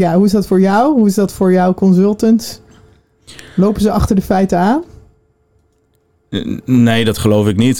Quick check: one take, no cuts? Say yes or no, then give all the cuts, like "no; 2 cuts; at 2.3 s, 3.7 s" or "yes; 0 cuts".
yes; 0 cuts